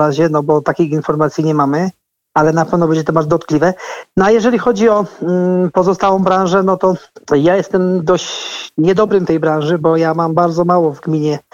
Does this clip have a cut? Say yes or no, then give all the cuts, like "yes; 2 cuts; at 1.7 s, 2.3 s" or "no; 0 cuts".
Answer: yes; 2 cuts; at 7.2 s, 9.3 s